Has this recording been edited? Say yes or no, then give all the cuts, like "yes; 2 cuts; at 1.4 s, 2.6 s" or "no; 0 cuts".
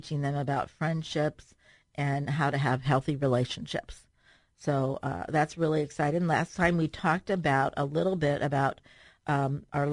no; 0 cuts